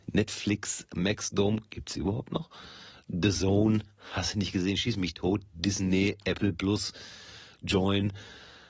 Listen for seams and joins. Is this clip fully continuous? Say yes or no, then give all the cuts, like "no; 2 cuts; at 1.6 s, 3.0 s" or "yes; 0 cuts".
yes; 0 cuts